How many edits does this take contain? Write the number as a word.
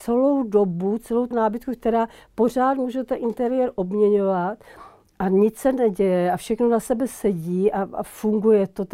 one